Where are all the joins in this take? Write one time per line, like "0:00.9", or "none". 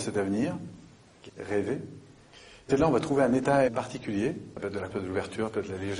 0:01.3
0:02.7
0:03.7
0:04.9